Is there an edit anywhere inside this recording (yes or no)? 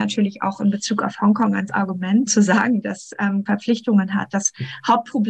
yes